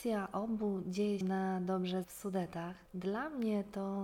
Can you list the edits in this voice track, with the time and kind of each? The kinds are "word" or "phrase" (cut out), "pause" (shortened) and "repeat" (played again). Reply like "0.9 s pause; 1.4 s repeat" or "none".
1.2 s word; 2.0 s phrase